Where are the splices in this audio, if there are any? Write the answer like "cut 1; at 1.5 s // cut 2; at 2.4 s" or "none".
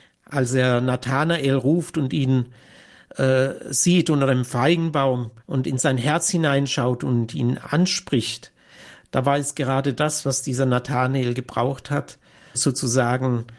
cut 1; at 5.4 s // cut 2; at 12.5 s